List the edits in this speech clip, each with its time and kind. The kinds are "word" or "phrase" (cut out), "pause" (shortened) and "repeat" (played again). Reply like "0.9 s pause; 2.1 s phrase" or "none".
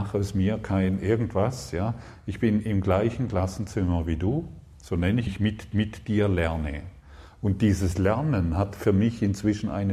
5.3 s phrase; 5.7 s repeat